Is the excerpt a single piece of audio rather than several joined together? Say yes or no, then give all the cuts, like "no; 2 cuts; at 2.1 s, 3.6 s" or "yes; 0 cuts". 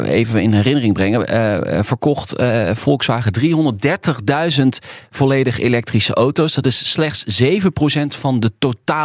yes; 0 cuts